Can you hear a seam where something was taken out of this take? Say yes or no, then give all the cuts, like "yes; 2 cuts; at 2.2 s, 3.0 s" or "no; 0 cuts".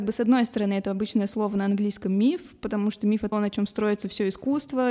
yes; 1 cut; at 3.3 s